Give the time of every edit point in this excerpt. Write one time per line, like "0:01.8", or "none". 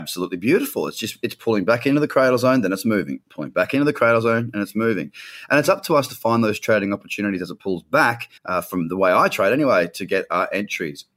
0:03.2
0:08.4